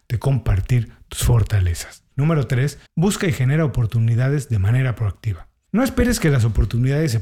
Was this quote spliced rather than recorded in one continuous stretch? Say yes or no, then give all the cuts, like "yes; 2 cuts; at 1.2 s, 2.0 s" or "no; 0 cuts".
yes; 1 cut; at 2.9 s